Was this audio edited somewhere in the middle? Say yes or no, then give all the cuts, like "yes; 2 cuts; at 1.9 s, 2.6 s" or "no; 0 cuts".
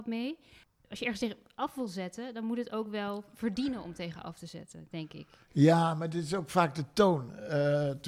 no; 0 cuts